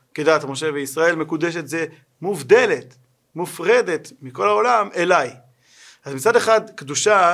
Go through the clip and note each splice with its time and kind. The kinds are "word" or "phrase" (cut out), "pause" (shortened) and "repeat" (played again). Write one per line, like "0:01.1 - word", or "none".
none